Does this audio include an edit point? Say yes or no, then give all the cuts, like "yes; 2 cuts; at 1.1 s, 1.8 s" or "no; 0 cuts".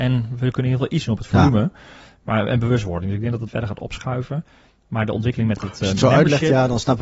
yes; 1 cut; at 3.5 s